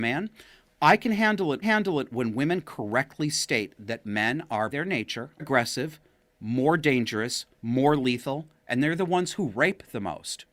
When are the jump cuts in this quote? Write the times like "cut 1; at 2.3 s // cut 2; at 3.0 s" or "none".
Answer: cut 1; at 1.6 s // cut 2; at 4.7 s // cut 3; at 5.4 s // cut 4; at 7.5 s